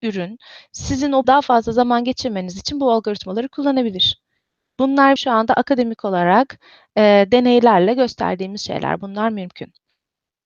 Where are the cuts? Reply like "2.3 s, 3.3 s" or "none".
1.2 s, 5.2 s